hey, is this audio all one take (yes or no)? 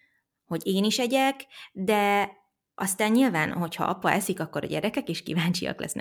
yes